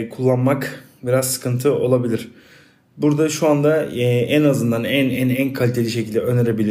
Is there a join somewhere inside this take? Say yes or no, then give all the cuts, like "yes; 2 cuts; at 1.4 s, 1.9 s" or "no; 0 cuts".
no; 0 cuts